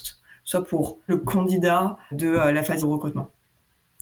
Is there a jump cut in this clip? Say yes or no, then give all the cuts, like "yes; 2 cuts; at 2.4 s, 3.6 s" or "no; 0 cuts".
yes; 3 cuts; at 1.1 s, 2.1 s, 2.8 s